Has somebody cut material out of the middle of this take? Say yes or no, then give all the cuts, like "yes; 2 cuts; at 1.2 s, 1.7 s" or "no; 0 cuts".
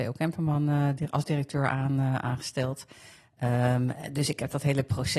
no; 0 cuts